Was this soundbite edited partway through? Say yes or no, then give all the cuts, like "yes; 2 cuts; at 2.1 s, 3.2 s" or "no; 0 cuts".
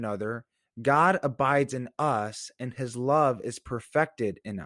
no; 0 cuts